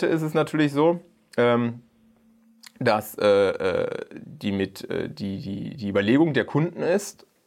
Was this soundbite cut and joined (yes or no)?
no